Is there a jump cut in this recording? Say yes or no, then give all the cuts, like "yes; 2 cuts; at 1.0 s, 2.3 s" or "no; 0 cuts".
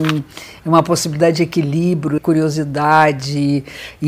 yes; 1 cut; at 2.2 s